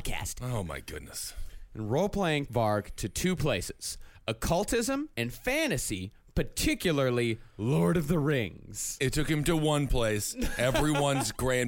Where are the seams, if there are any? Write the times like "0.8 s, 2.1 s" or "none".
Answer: 2.5 s, 5.1 s